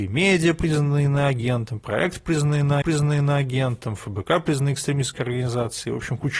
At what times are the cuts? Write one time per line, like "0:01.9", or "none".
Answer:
0:02.8